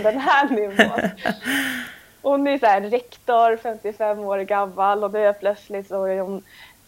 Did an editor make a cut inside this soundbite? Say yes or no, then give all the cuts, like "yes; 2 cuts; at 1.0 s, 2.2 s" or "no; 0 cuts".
no; 0 cuts